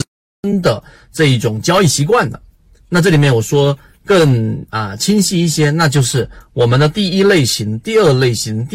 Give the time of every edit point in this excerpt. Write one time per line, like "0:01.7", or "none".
none